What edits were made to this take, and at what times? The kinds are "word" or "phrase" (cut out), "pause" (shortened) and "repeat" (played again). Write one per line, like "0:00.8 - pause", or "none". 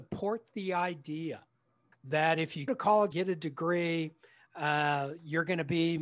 0:01.9 - word
0:02.7 - word
0:03.1 - word